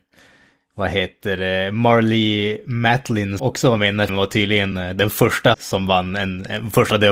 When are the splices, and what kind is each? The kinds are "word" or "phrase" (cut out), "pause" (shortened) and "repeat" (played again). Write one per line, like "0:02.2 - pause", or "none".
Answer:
0:03.4 - word
0:04.1 - word
0:04.7 - word
0:05.5 - word